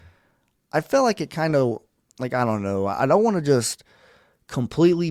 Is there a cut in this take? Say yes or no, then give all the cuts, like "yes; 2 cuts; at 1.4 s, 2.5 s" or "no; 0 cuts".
no; 0 cuts